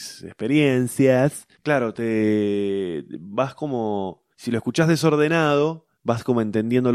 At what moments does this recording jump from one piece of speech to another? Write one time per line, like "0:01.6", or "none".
0:01.5
0:04.3
0:05.9